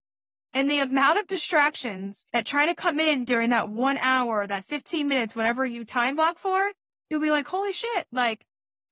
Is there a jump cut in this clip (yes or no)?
yes